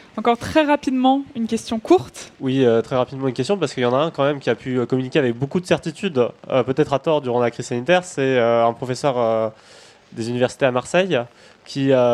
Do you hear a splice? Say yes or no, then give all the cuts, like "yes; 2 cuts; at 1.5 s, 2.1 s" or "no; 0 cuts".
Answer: yes; 1 cut; at 2.3 s